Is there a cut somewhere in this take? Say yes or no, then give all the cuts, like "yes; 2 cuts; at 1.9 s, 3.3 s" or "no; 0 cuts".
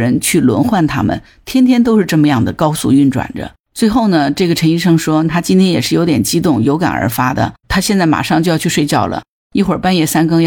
yes; 2 cuts; at 3.6 s, 7.6 s